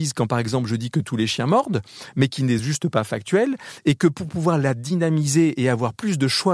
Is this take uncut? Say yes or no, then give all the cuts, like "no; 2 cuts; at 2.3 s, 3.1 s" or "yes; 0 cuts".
yes; 0 cuts